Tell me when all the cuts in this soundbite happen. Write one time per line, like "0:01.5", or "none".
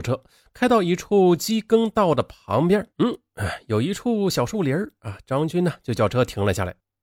0:02.9